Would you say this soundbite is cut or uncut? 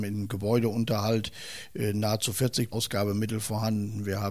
cut